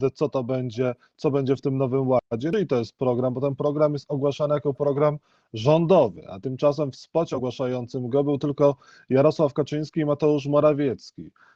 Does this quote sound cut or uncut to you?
uncut